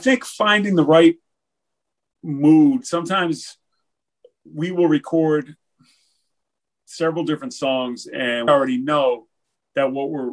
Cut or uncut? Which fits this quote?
cut